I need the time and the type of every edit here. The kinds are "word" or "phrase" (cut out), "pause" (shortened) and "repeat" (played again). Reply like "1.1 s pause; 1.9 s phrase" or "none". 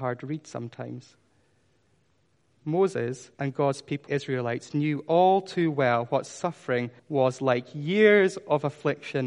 3.3 s pause; 4.1 s word; 7.0 s pause